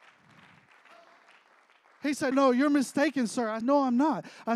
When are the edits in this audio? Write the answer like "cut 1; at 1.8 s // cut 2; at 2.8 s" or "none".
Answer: cut 1; at 2.3 s // cut 2; at 3.6 s